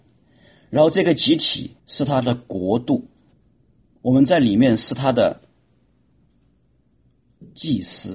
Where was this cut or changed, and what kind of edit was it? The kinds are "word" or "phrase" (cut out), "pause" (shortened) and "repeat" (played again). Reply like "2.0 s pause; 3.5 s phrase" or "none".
1.8 s pause; 3.3 s pause